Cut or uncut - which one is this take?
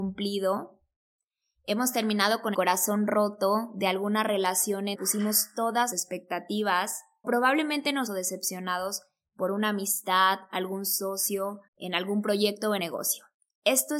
cut